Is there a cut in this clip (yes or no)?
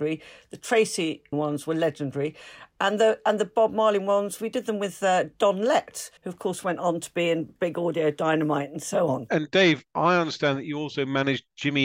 yes